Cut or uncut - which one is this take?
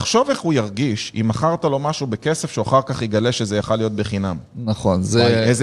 uncut